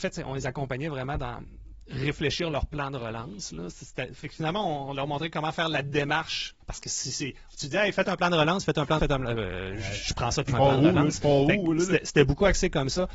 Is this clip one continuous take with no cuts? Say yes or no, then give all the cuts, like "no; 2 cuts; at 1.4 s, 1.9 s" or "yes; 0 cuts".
no; 3 cuts; at 6.6 s, 9.0 s, 10.5 s